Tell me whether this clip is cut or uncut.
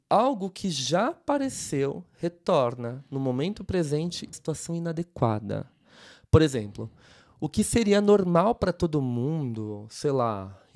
cut